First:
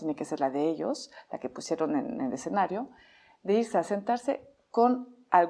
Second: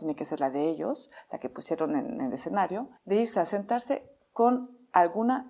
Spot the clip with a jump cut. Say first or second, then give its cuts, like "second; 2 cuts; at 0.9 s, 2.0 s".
second; 1 cut; at 3.0 s